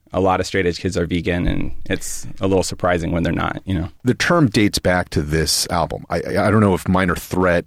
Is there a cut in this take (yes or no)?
yes